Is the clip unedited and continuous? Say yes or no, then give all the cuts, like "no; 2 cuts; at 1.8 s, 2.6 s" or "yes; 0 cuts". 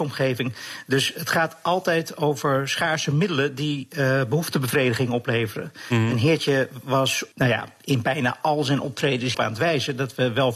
no; 2 cuts; at 7.3 s, 9.3 s